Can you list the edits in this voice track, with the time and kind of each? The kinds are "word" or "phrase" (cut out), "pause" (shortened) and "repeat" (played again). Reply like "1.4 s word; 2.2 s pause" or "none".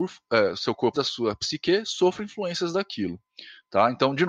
0.9 s word